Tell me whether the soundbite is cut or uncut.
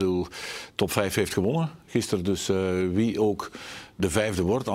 uncut